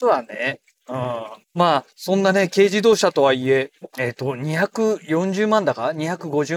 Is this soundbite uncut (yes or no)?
no